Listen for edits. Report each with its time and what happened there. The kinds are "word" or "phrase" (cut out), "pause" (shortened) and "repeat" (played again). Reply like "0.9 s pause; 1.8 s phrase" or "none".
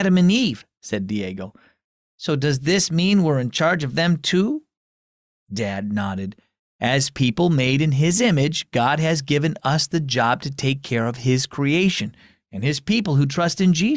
none